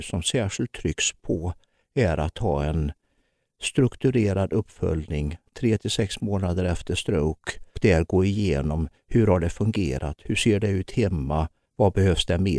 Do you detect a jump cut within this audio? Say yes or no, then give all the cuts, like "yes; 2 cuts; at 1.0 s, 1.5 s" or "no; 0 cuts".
yes; 1 cut; at 7.7 s